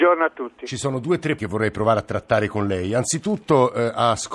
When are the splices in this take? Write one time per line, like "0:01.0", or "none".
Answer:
0:01.4